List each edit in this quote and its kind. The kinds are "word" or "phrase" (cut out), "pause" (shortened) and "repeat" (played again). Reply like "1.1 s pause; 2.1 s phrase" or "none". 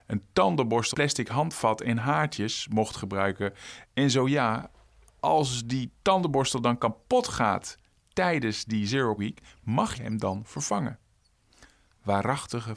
0.9 s word; 9.2 s word; 9.9 s word